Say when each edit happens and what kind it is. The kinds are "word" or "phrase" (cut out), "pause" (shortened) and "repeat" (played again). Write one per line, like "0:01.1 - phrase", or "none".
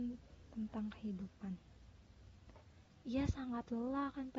none